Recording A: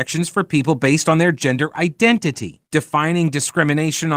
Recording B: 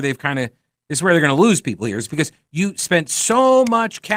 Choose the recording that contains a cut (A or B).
A